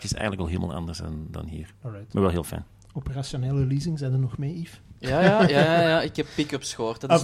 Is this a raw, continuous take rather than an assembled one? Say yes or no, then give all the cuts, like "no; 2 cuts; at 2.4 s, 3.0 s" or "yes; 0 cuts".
yes; 0 cuts